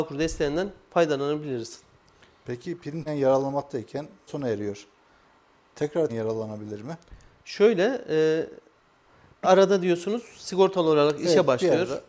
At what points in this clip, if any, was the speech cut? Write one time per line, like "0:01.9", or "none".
0:03.1
0:04.3
0:06.1
0:09.4